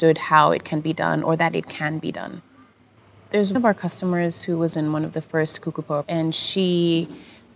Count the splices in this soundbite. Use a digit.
3